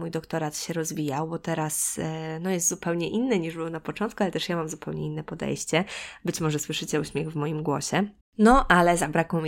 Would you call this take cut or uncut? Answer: cut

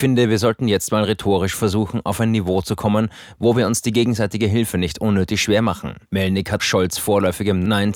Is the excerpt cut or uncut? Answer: cut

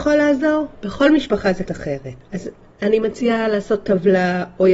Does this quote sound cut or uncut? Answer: cut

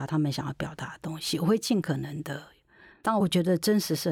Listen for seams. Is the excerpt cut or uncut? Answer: uncut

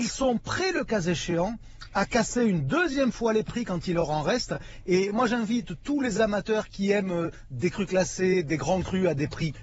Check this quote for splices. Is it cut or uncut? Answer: uncut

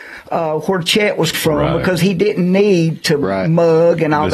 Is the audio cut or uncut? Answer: cut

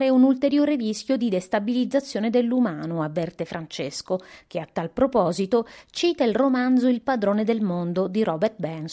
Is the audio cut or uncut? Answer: uncut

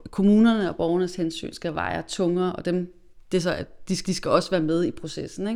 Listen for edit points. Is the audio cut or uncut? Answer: cut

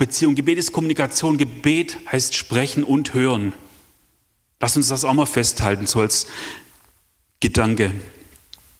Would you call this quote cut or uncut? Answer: uncut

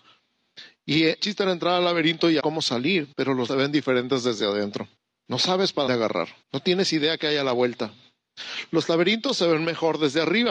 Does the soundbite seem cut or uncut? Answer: cut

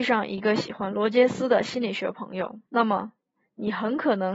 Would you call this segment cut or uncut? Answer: cut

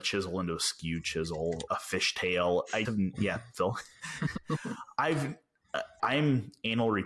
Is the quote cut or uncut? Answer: cut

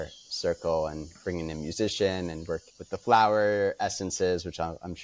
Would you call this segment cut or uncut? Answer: cut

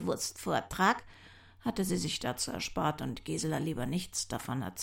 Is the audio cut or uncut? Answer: uncut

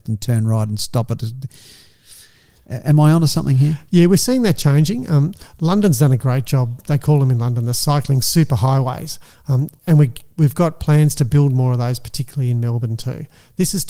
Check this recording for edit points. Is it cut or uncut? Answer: uncut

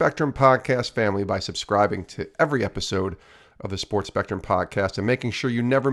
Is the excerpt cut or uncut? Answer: uncut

